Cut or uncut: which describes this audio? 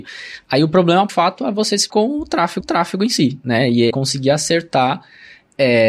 cut